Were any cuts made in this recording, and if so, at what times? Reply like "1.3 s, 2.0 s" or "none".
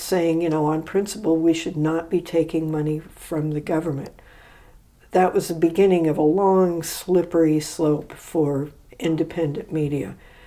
none